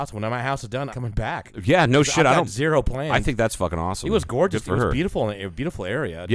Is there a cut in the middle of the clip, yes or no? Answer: yes